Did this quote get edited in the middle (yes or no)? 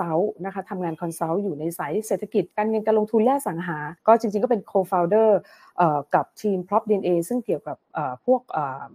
yes